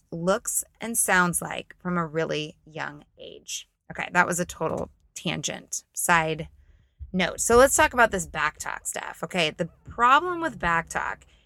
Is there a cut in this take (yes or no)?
no